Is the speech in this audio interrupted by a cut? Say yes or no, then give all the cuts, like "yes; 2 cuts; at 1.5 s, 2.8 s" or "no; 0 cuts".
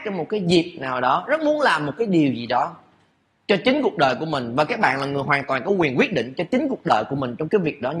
no; 0 cuts